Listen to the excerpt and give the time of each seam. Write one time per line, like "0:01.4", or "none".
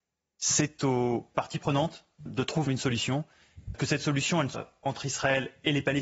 0:02.3
0:02.7
0:03.7
0:04.5